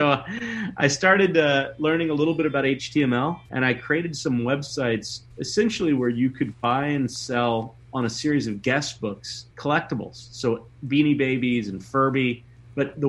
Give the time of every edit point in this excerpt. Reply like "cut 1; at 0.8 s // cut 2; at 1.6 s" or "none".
cut 1; at 3.4 s // cut 2; at 5.3 s // cut 3; at 9.5 s